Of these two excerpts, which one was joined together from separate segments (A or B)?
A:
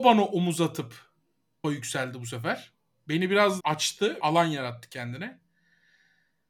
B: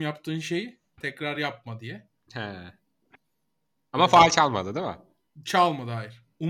A